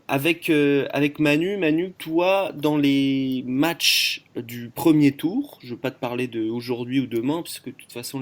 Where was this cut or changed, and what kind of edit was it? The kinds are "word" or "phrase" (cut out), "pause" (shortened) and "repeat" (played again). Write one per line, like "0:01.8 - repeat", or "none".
0:02.0 - pause